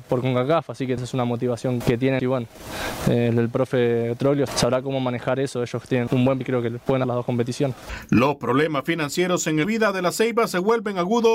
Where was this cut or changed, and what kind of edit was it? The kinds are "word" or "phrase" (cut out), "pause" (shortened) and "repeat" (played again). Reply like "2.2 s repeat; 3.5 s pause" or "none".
1.0 s word; 1.8 s word; 2.2 s word; 4.5 s word; 6.1 s word; 6.4 s word; 7.0 s word; 9.6 s word